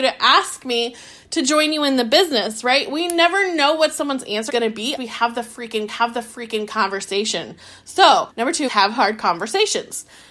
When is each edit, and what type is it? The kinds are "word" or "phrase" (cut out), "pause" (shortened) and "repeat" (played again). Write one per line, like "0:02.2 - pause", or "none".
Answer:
0:04.5 - word
0:05.0 - word
0:05.9 - repeat
0:08.3 - pause
0:08.7 - word

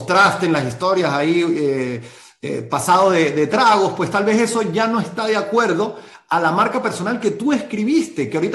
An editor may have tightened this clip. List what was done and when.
none

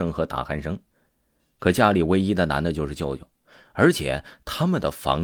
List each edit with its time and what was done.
none

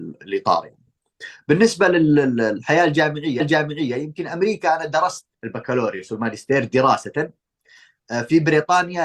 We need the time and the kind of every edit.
0:03.4 - repeat
0:05.3 - pause

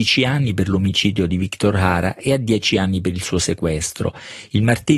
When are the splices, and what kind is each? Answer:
none

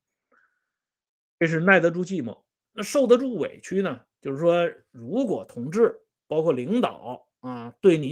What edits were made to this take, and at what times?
none

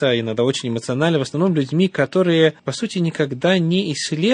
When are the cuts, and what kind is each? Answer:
0:02.6 - pause

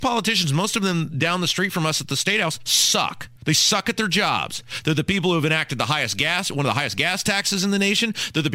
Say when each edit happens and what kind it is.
0:03.4 - pause

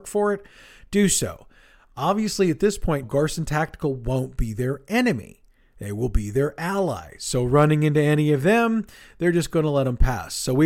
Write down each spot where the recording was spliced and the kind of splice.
0:03.0 - word

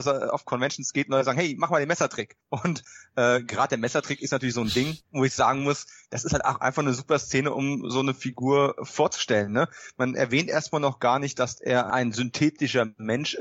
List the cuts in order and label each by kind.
0:02.4 - pause
0:05.0 - pause

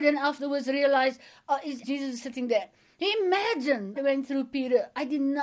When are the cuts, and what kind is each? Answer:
0:01.8 - word
0:04.0 - word

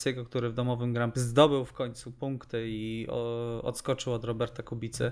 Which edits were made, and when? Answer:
0:01.1 - word

